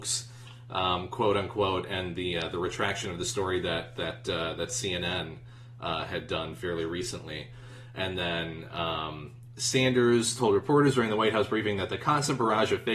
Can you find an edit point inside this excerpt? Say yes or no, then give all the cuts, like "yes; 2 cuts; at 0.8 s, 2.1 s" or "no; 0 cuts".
no; 0 cuts